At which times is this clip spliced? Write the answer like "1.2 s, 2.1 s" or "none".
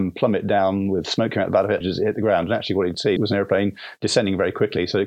1.8 s, 3.2 s